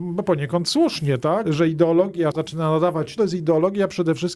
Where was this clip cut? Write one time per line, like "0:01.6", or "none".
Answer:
0:01.4
0:02.3
0:03.2